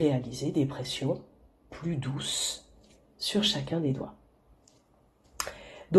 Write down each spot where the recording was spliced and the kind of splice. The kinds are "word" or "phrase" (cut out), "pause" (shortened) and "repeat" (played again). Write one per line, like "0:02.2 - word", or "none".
none